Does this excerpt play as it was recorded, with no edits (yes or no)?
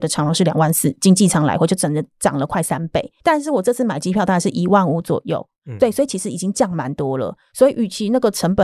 no